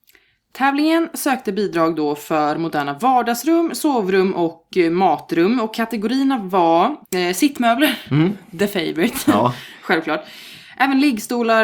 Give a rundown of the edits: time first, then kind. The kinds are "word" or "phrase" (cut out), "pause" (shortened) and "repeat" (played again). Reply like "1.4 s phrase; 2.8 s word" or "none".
7.0 s pause

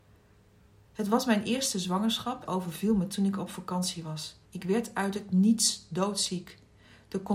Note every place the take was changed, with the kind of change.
2.5 s phrase; 4.4 s pause

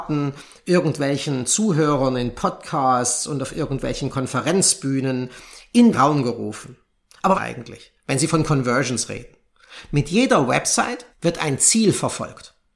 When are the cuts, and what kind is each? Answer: 5.9 s word; 7.3 s phrase; 11.1 s pause

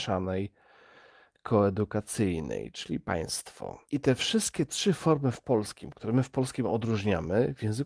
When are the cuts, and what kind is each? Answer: 3.8 s pause

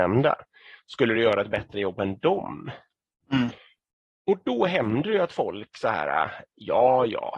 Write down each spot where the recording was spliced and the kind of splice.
none

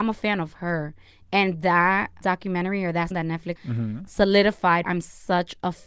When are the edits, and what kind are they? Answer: 2.2 s word; 3.1 s word; 3.6 s word; 4.8 s word

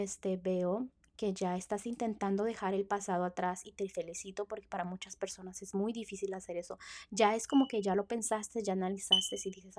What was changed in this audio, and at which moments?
none

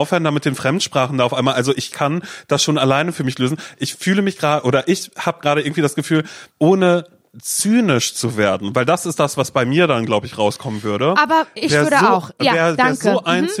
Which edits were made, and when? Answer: 6.5 s pause

